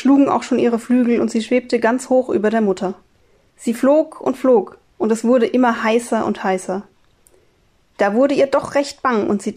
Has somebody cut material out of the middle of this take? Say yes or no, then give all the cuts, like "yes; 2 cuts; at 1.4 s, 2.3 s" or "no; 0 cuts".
yes; 1 cut; at 4.8 s